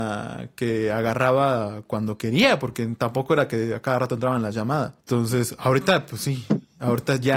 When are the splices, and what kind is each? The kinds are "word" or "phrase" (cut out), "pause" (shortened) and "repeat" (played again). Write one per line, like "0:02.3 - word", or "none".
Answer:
0:05.0 - pause